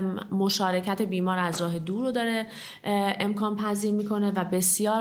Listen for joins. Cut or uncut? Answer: uncut